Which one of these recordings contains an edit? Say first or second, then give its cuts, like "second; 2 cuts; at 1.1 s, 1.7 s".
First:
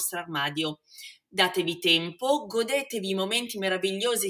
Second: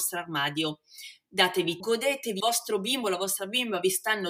second; 2 cuts; at 1.8 s, 2.4 s